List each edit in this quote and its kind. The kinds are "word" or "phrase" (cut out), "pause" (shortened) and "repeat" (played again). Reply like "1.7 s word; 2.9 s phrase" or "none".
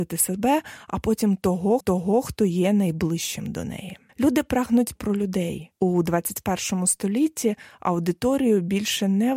1.8 s repeat; 4.1 s pause; 5.0 s word; 5.7 s pause